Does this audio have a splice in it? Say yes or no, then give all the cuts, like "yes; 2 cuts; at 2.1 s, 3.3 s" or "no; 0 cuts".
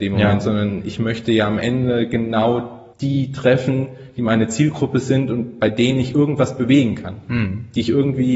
yes; 1 cut; at 2.9 s